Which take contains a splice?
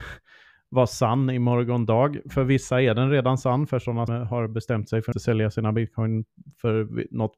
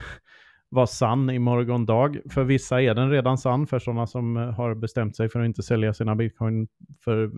first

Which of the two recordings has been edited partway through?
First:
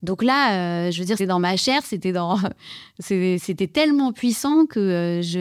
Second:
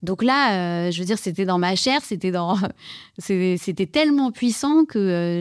first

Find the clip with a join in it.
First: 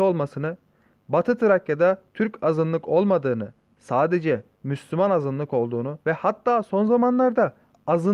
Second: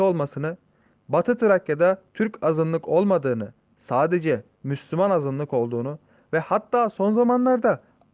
first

